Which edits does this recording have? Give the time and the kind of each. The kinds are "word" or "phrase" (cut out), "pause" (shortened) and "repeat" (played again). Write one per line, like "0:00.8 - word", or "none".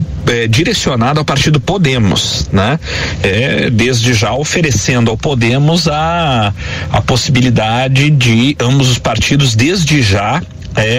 none